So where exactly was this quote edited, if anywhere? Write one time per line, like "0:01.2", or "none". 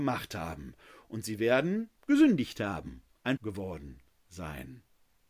0:02.0
0:03.4